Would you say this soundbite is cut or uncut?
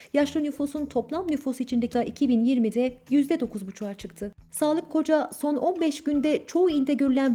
cut